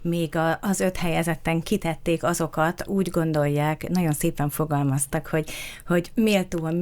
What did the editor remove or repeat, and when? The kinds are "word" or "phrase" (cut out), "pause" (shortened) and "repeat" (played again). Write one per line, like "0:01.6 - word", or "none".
0:01.6 - word
0:02.9 - word